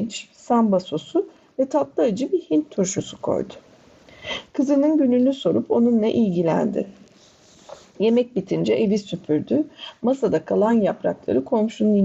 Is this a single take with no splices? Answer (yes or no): yes